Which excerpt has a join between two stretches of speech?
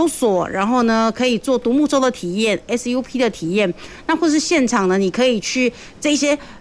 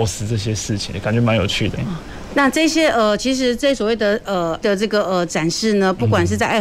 second; 3 cuts; at 0.9 s, 1.7 s, 4.6 s

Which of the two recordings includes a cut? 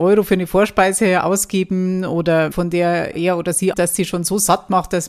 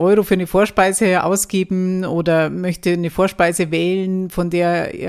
first; 3 cuts; at 2.5 s, 3.1 s, 3.7 s

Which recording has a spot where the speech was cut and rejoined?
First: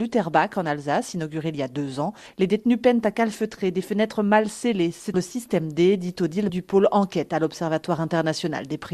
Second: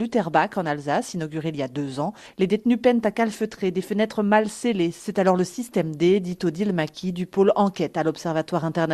first; 2 cuts; at 5.1 s, 6.5 s

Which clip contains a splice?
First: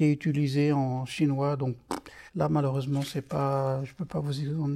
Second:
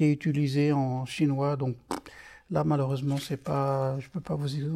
first; 1 cut; at 2.3 s

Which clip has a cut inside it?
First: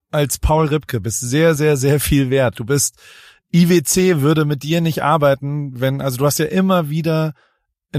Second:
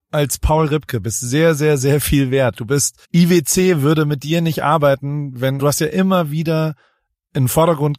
second; 2 cuts; at 3.0 s, 5.6 s

